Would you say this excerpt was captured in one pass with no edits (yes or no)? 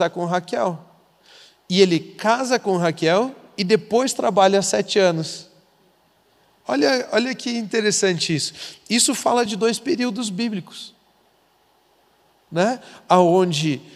yes